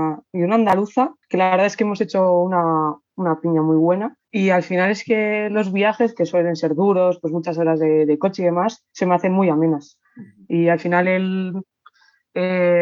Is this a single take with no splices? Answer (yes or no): no